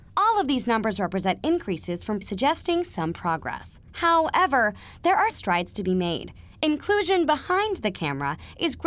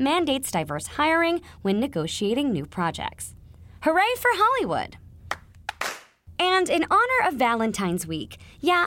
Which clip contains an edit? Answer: first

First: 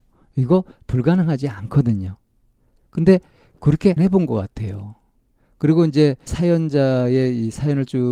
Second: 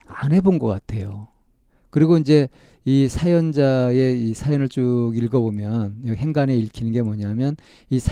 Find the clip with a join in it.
first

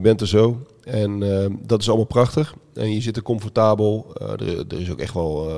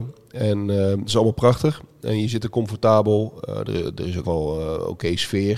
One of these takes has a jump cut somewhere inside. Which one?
second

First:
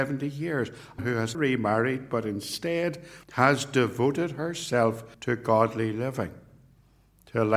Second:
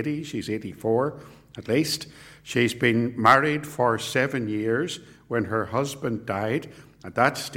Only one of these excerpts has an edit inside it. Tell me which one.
first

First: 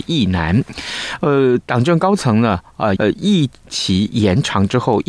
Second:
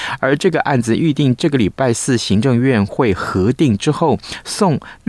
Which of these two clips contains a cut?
first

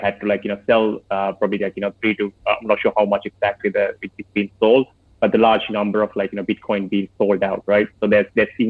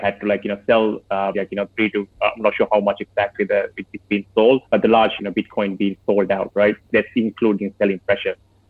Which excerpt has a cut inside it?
second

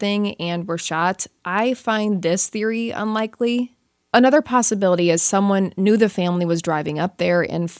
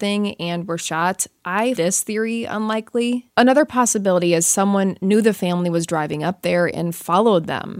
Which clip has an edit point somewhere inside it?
second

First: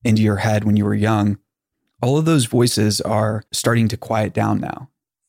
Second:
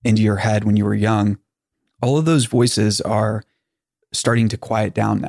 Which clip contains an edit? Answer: first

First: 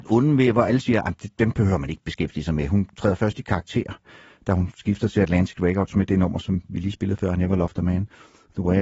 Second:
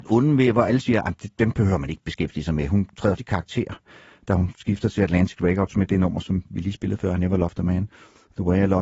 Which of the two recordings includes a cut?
second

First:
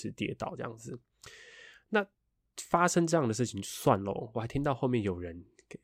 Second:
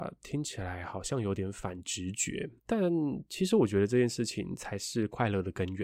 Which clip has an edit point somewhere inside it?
second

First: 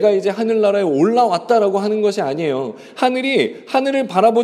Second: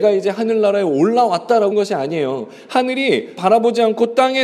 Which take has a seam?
second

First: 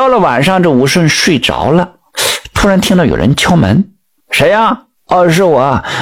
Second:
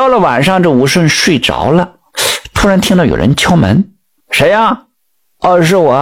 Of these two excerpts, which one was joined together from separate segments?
first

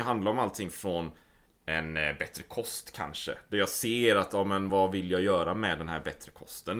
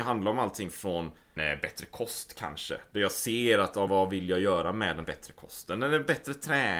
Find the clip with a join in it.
second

